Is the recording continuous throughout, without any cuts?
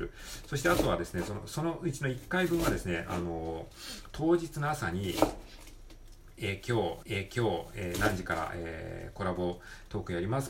no; 1 cut; at 7.0 s

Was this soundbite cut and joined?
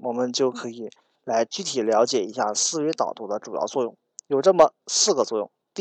no; 0 cuts

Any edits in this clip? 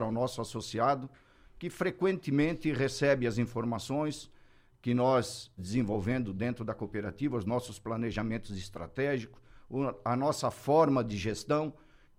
yes; 1 cut; at 5.6 s

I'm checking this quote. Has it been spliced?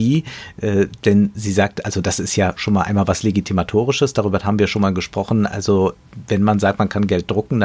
no; 0 cuts

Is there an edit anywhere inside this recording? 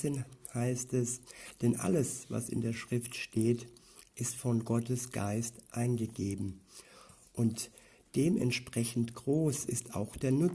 no; 0 cuts

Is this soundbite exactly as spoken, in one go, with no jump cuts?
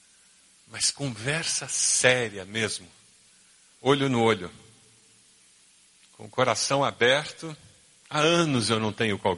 yes; 0 cuts

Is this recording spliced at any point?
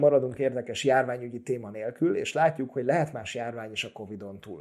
no; 0 cuts

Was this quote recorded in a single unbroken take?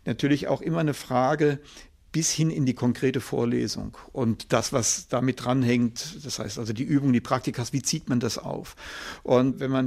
yes; 0 cuts

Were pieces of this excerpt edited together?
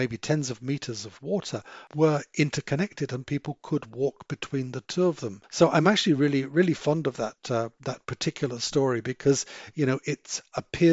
no; 0 cuts

